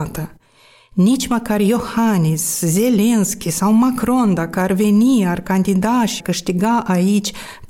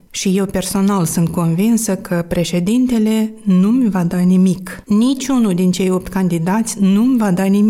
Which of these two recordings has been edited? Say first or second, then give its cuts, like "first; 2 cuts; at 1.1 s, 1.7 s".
first; 1 cut; at 6.2 s